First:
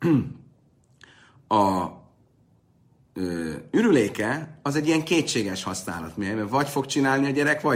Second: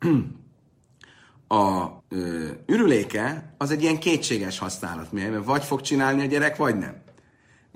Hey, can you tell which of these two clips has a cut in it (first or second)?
second